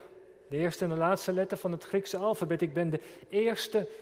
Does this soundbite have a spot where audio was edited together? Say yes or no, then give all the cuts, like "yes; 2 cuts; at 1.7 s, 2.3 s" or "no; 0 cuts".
no; 0 cuts